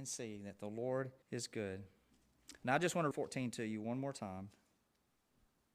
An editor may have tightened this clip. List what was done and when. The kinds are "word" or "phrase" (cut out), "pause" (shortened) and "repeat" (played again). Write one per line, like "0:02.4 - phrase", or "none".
0:01.2 - pause
0:03.1 - phrase